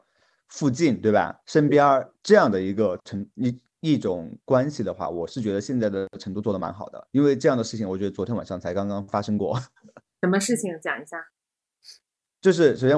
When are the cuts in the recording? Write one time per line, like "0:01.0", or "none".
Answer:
0:02.1